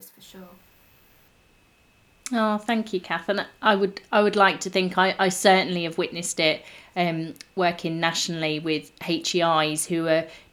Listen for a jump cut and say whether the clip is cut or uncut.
uncut